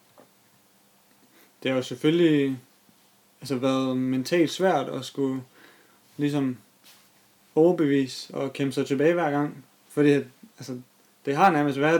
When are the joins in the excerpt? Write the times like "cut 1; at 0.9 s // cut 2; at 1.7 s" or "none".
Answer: none